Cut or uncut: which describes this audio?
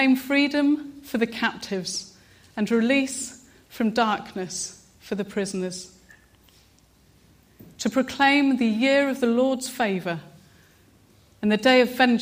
uncut